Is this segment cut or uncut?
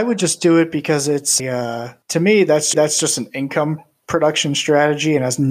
cut